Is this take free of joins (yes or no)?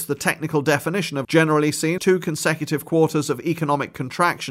no